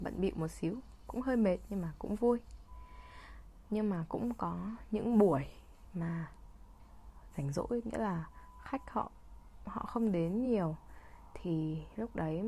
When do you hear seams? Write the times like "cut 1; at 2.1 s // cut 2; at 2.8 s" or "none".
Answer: none